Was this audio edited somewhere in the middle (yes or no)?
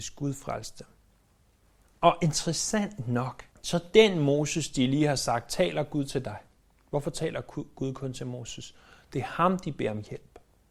yes